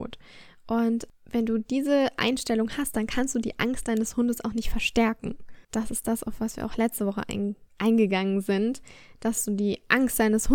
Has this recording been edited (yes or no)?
yes